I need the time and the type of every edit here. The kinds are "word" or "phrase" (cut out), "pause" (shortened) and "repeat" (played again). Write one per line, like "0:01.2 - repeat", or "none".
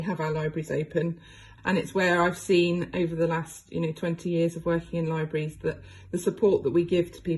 0:01.6 - word